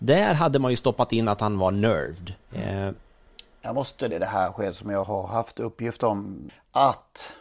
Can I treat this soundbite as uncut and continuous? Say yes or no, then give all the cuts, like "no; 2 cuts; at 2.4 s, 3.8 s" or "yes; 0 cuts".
no; 3 cuts; at 2.4 s, 4.1 s, 5.0 s